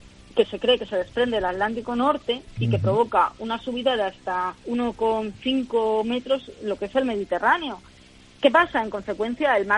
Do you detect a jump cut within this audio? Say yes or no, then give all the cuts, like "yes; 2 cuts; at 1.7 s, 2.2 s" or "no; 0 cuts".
yes; 2 cuts; at 4.6 s, 8.3 s